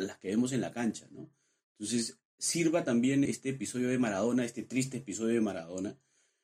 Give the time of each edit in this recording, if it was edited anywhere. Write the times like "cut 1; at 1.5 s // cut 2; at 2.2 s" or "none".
cut 1; at 3.3 s